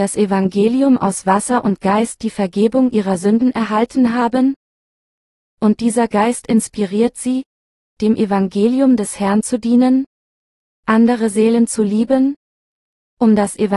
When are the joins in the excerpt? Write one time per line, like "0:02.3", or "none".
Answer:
none